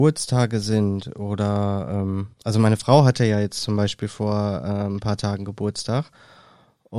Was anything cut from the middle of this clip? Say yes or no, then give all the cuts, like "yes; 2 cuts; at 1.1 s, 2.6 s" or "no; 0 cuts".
yes; 1 cut; at 2.3 s